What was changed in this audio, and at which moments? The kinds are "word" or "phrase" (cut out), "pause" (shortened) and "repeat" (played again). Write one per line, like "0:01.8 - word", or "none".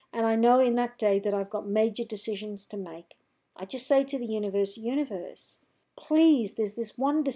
0:05.8 - pause

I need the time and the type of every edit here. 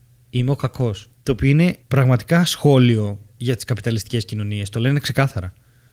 0:01.1 - pause
0:01.8 - pause

